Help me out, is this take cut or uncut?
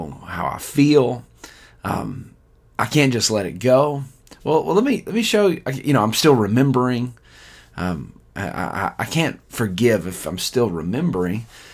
uncut